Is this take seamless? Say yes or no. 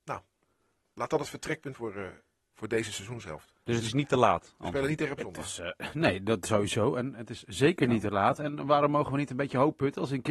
no